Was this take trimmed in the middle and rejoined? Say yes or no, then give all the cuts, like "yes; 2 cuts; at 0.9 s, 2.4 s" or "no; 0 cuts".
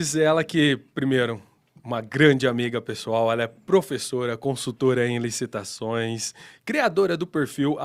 no; 0 cuts